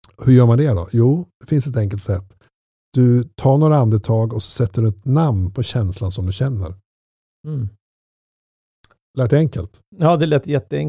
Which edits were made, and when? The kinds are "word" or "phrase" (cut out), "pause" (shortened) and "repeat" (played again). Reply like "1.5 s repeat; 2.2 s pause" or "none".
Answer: none

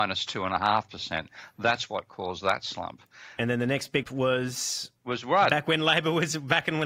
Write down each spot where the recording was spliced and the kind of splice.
4.0 s word; 5.0 s pause

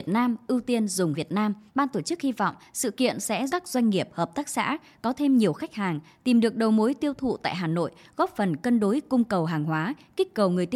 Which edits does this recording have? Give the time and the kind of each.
1.1 s word; 1.7 s pause; 3.5 s word

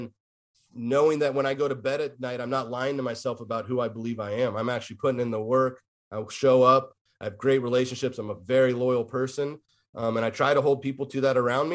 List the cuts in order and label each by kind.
none

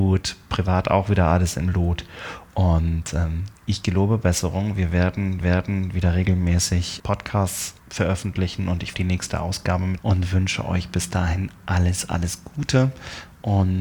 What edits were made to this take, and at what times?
3.6 s pause; 5.4 s repeat; 7.0 s word; 7.8 s pause; 8.9 s phrase; 10.0 s word

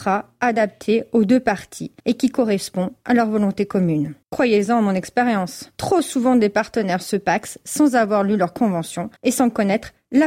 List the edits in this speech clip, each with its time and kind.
2.0 s pause; 4.2 s pause; 5.7 s pause; 9.2 s pause

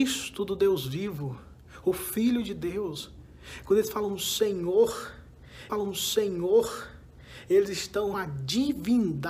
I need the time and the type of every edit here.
5.7 s repeat; 8.1 s word

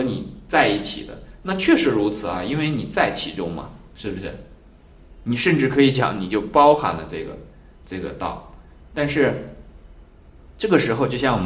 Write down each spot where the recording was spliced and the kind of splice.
none

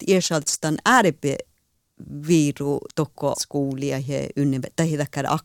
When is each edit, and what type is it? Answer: 3.3 s word

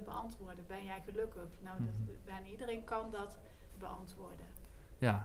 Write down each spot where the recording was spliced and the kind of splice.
3.7 s word

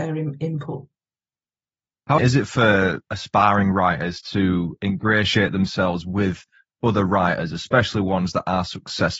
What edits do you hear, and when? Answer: 2.2 s word

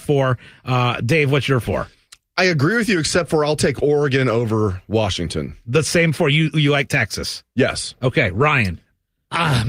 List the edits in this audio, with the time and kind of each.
none

